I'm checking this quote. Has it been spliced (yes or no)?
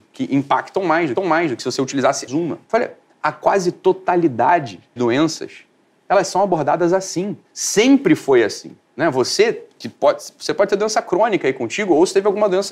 yes